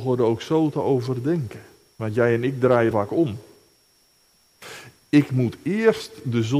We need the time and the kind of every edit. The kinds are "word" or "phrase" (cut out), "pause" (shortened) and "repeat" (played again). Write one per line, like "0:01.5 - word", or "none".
0:02.9 - phrase